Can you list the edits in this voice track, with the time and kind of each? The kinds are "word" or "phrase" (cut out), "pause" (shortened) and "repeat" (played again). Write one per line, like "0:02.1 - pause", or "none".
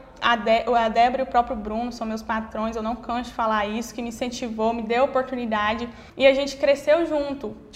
0:06.1 - pause